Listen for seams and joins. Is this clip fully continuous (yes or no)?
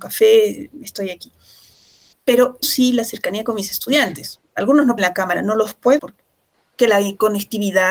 no